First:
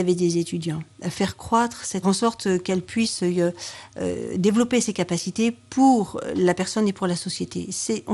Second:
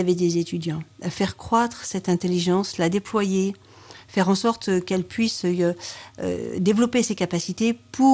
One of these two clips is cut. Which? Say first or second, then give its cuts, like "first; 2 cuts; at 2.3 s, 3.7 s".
first; 1 cut; at 2.0 s